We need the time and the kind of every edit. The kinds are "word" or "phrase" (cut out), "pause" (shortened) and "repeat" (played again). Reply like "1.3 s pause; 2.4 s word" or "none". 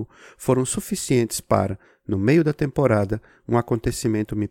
none